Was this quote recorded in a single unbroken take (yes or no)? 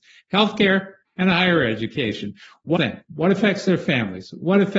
no